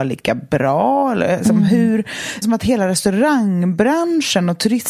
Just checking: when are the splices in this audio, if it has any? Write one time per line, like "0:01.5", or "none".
0:02.4